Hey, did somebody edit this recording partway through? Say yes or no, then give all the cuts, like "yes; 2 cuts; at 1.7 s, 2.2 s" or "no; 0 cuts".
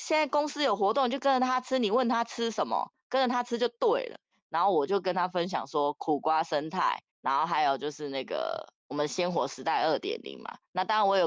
yes; 3 cuts; at 4.2 s, 7.1 s, 8.8 s